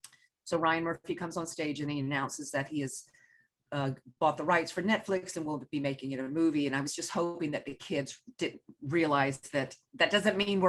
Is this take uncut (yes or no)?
yes